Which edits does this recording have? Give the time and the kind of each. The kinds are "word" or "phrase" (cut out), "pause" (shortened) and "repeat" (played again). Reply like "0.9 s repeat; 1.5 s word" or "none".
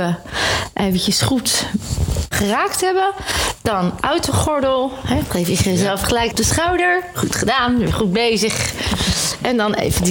2.3 s word; 4.0 s word; 6.3 s phrase